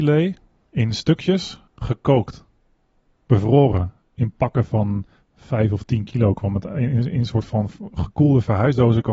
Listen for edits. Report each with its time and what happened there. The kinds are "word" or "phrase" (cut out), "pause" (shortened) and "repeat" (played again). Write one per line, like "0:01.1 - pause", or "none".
0:01.7 - pause